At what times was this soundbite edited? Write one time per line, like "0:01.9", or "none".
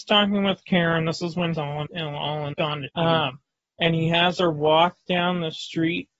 0:01.5
0:01.9
0:02.5
0:02.9